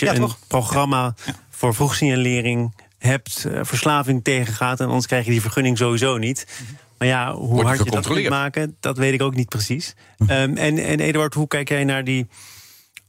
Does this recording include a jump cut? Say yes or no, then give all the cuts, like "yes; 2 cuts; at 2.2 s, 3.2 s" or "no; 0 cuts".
no; 0 cuts